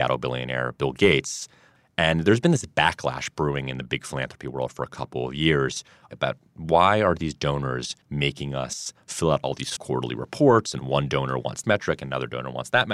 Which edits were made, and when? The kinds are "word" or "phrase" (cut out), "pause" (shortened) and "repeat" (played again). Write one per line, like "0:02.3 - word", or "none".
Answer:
0:08.0 - pause
0:09.8 - phrase
0:11.6 - word